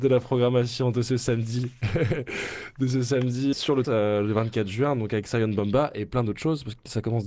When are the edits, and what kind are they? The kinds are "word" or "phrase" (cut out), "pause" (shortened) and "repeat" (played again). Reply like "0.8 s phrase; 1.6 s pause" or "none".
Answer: 3.5 s word; 3.8 s phrase